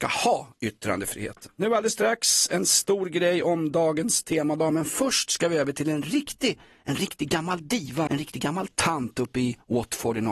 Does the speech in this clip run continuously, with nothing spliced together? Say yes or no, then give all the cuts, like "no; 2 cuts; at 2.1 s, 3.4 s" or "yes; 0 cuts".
no; 1 cut; at 8.1 s